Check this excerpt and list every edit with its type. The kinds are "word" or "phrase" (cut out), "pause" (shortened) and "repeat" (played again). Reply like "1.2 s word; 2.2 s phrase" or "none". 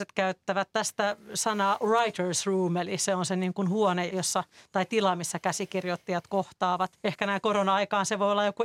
4.1 s word; 7.0 s pause